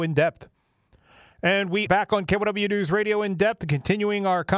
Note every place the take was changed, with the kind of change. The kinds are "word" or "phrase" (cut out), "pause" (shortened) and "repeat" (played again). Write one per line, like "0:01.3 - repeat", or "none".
0:01.9 - word